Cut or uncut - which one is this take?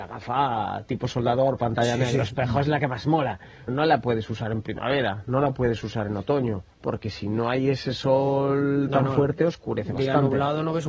cut